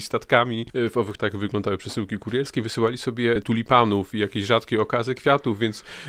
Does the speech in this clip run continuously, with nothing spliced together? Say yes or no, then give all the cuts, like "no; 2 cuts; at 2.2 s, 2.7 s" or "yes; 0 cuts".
no; 2 cuts; at 1.2 s, 3.4 s